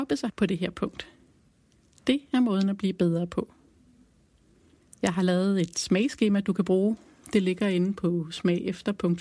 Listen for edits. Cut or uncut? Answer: uncut